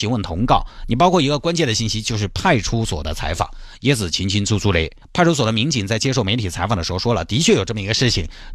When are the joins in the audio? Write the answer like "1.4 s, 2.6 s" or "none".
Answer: 5.0 s